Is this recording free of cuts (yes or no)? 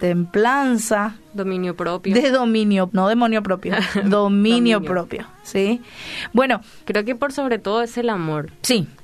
no